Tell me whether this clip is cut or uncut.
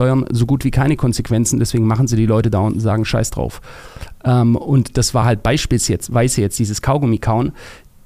uncut